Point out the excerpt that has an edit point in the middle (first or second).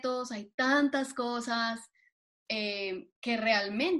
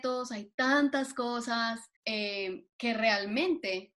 second